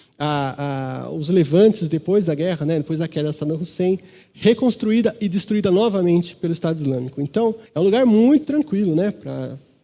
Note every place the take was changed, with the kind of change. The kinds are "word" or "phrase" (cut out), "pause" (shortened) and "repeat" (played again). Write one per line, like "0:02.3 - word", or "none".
0:07.7 - pause
0:08.4 - word